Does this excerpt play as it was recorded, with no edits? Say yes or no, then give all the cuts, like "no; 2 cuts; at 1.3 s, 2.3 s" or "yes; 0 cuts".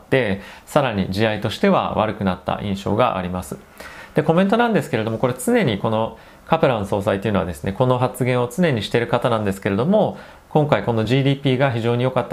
yes; 0 cuts